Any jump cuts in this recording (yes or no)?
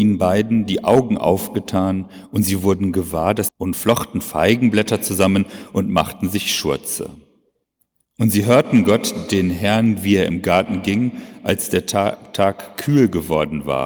yes